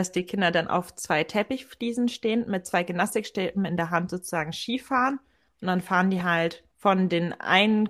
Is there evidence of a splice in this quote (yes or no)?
no